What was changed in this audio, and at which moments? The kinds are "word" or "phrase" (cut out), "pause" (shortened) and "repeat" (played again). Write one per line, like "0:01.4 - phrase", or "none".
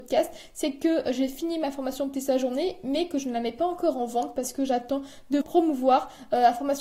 0:02.1 - word
0:05.4 - word